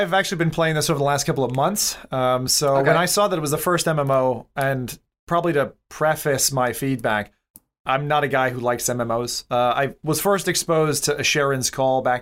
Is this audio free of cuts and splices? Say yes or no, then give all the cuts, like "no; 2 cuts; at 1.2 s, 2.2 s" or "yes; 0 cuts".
yes; 0 cuts